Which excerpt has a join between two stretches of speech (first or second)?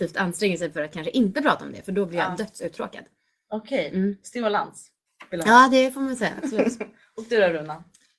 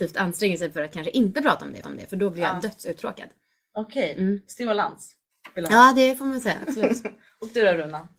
second